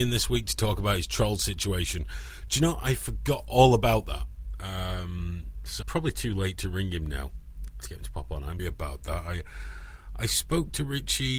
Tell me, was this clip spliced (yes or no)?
yes